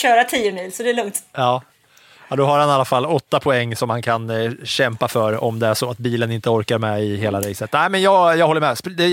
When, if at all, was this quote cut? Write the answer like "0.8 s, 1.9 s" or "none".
none